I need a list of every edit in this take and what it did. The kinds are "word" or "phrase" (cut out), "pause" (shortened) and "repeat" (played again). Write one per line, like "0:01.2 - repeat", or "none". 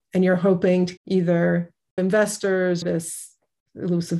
0:01.0 - word
0:02.0 - word
0:02.8 - word